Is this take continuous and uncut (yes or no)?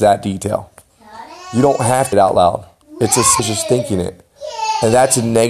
no